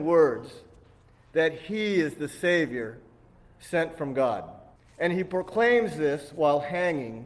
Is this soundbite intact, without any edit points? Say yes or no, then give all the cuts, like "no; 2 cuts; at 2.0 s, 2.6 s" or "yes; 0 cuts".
no; 1 cut; at 4.8 s